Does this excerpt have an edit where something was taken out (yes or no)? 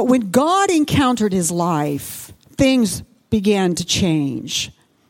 no